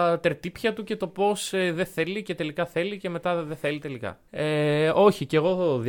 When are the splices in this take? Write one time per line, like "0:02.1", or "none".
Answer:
0:04.3